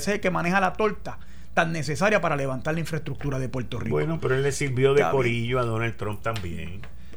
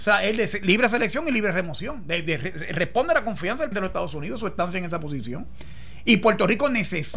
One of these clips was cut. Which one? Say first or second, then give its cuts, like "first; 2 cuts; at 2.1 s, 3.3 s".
second; 1 cut; at 3.7 s